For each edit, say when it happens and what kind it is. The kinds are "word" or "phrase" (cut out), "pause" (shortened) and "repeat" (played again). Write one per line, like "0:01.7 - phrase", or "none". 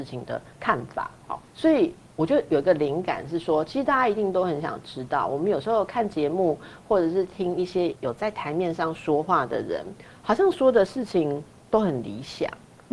0:01.5 - pause

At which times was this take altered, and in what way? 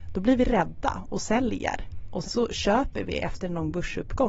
0:02.2 - word

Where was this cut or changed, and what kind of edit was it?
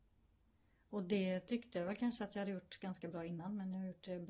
none

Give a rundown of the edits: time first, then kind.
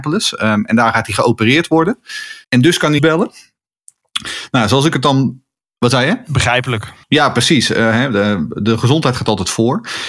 0:02.4 - pause
0:03.0 - phrase
0:07.0 - pause

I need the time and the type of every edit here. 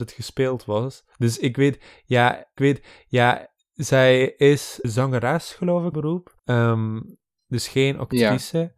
0:01.1 - pause
0:02.6 - repeat
0:04.8 - word
0:05.9 - word
0:06.4 - pause

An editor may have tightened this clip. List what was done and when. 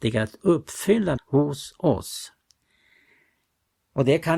0:01.2 - word

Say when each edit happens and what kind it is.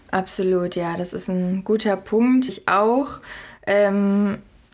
0:02.5 - word

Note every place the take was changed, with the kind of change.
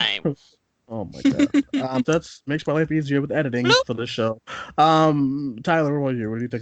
0:02.0 - phrase

